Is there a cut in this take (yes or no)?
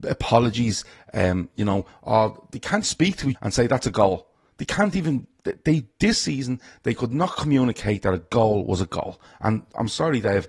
yes